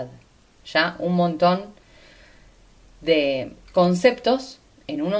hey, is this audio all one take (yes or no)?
yes